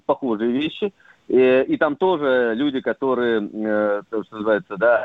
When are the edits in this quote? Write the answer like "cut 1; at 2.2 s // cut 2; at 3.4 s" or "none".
none